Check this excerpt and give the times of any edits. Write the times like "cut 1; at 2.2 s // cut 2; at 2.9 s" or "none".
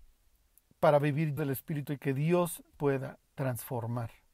cut 1; at 1.4 s // cut 2; at 1.8 s // cut 3; at 2.7 s